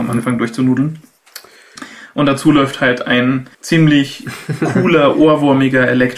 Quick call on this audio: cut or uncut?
cut